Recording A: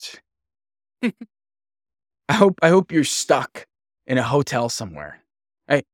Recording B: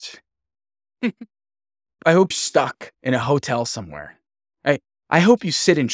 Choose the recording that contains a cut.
B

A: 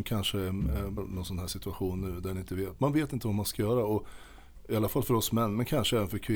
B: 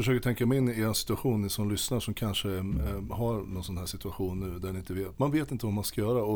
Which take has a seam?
A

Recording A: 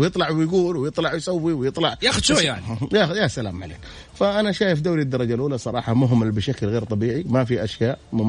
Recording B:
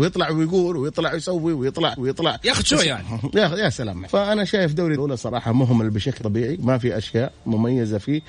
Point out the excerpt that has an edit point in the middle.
B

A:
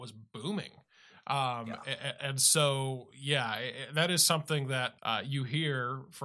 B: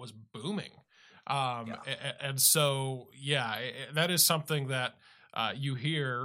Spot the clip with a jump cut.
A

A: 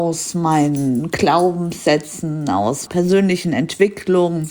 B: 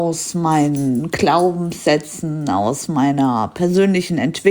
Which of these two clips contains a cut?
A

